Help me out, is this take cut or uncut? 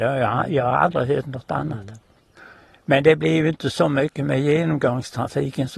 uncut